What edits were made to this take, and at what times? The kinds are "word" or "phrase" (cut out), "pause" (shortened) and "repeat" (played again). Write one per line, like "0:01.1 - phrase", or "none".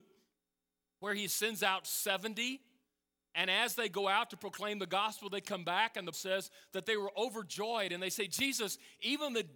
0:06.1 - word

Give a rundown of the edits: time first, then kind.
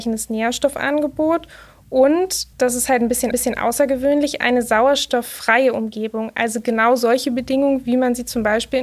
0:02.5 - pause
0:03.3 - repeat

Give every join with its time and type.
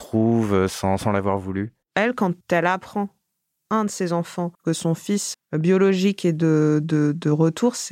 0:01.8 - pause
0:02.4 - pause
0:03.7 - word
0:04.5 - pause
0:05.3 - word

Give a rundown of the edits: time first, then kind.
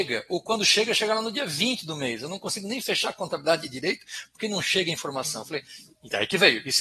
none

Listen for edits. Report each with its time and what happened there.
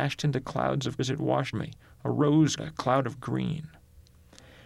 0:01.0 - word
0:01.5 - word
0:02.6 - word

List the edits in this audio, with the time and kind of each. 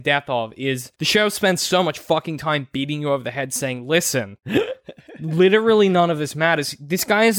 0:00.9 - pause

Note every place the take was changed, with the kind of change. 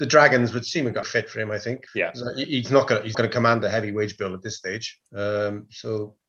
0:01.0 - phrase
0:01.9 - pause
0:03.1 - word
0:05.0 - pause

